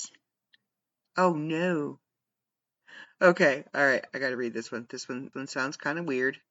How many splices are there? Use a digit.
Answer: 1